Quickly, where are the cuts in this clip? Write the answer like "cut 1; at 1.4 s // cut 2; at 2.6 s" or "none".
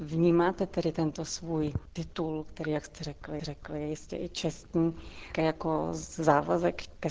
cut 1; at 3.4 s // cut 2; at 5.3 s

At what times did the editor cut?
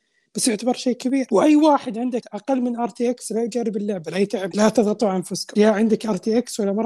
cut 1; at 2.2 s // cut 2; at 4.5 s

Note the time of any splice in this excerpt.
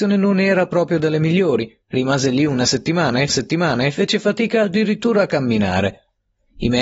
cut 1; at 1.8 s // cut 2; at 3.3 s

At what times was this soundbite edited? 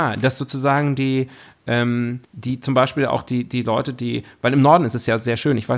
cut 1; at 2.2 s

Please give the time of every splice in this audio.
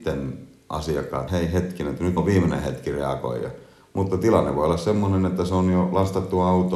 cut 1; at 1.3 s // cut 2; at 2.2 s

